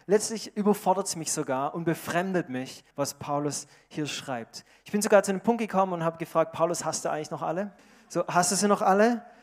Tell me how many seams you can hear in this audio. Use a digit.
2